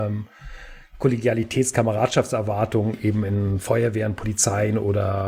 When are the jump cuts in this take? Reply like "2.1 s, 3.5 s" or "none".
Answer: none